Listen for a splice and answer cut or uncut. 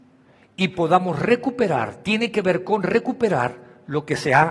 uncut